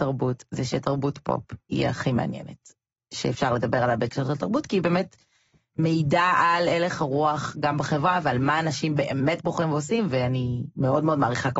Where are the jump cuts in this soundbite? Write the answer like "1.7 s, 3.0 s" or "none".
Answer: none